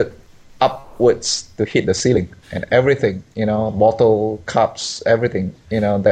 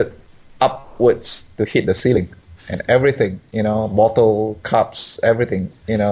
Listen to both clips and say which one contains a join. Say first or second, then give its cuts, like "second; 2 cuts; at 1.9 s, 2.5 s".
first; 1 cut; at 2.4 s